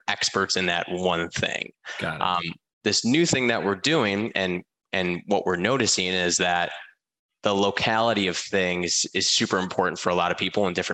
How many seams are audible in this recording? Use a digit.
0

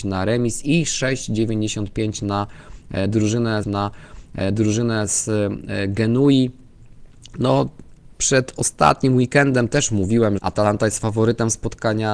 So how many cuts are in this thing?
3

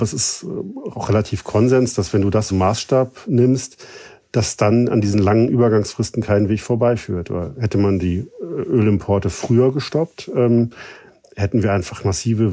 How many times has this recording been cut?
3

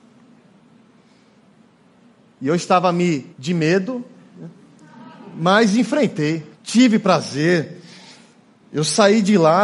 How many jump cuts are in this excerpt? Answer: 2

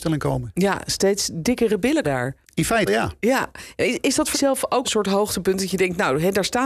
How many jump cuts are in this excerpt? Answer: 5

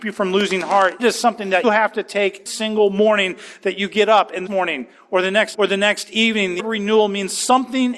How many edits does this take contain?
6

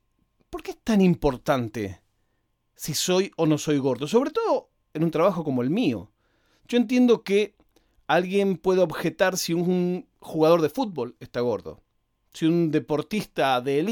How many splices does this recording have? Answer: 0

